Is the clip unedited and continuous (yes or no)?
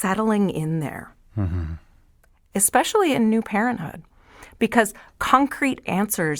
yes